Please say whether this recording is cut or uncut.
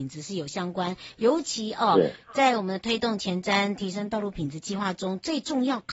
uncut